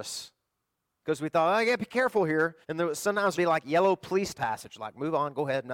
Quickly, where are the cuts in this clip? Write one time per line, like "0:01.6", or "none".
0:02.6
0:03.3
0:04.3